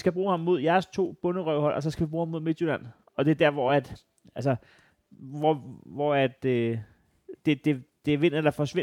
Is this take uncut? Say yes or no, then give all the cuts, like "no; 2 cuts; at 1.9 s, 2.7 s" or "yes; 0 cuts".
yes; 0 cuts